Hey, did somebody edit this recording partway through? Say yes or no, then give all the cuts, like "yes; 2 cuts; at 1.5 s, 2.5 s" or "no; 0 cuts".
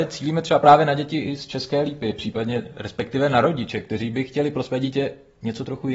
no; 0 cuts